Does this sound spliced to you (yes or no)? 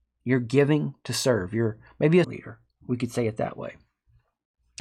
yes